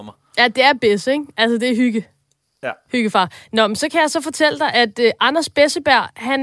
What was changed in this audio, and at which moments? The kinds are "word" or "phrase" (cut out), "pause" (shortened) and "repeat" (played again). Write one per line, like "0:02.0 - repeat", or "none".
none